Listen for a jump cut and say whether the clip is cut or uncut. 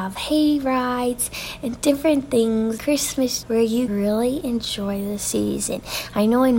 cut